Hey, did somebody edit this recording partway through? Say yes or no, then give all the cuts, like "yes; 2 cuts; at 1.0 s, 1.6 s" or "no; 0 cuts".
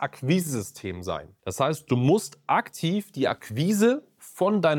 yes; 1 cut; at 1.4 s